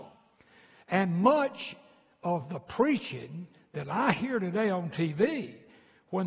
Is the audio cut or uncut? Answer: uncut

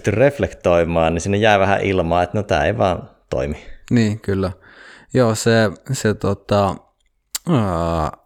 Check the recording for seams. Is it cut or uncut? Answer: uncut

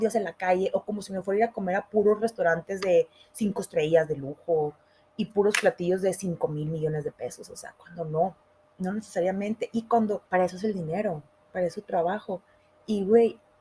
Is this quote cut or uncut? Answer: cut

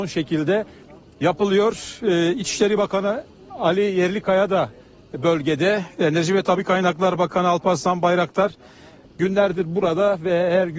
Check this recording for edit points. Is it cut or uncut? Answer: uncut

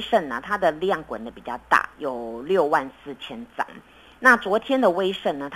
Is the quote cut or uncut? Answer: uncut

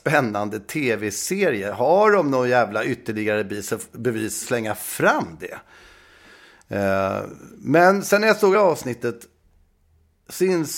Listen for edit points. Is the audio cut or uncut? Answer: cut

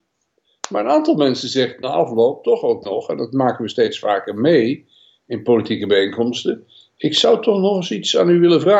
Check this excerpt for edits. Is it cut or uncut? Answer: uncut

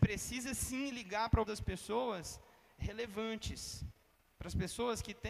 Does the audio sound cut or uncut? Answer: cut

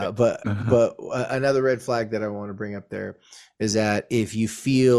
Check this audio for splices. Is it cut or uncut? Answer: uncut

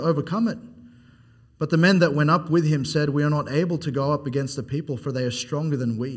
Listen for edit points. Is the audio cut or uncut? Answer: uncut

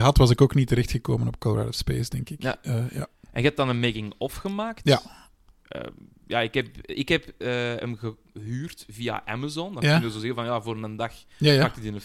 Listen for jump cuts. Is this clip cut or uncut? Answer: uncut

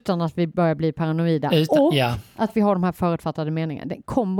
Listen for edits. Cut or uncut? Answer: uncut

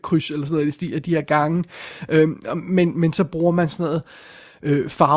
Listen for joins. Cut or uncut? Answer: uncut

